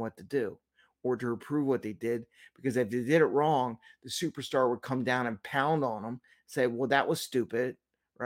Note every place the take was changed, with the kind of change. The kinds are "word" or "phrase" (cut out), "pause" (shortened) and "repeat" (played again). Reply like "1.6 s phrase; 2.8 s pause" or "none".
none